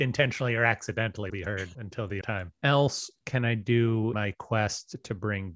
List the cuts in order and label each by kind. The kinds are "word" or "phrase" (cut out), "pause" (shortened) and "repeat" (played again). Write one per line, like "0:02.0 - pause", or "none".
0:01.3 - word
0:01.7 - word
0:02.2 - word
0:02.5 - word
0:04.1 - word